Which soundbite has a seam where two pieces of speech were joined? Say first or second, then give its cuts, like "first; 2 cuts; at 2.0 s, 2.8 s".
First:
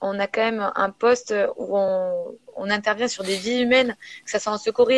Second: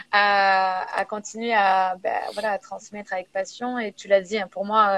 second; 1 cut; at 3.9 s